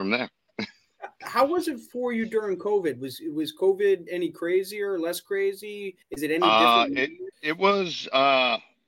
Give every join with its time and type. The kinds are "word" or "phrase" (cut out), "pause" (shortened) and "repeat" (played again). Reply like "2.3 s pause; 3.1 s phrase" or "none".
6.0 s pause; 7.3 s pause